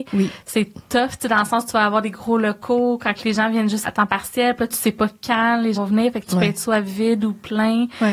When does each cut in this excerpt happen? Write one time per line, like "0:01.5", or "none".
0:03.8
0:05.7